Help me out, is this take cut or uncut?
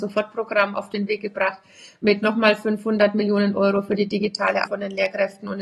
cut